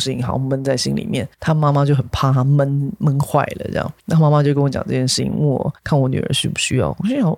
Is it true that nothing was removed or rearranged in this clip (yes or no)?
no